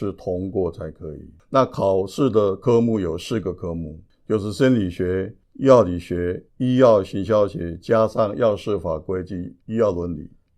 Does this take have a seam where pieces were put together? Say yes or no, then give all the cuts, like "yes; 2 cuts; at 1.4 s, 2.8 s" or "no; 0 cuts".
yes; 3 cuts; at 5.4 s, 6.5 s, 9.6 s